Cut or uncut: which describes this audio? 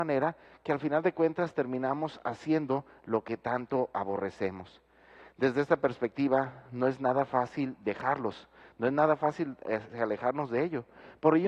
uncut